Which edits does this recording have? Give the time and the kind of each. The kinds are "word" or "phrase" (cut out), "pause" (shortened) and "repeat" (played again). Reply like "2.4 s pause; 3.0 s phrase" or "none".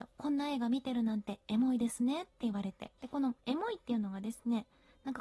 2.9 s pause; 3.4 s pause